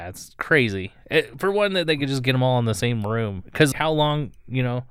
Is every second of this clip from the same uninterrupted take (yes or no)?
no